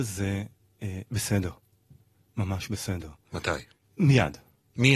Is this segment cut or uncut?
uncut